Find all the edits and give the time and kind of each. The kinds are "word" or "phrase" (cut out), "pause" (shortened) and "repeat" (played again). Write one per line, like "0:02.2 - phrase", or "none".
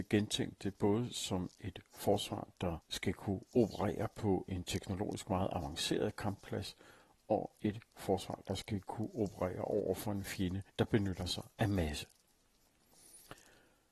0:02.8 - pause
0:10.7 - pause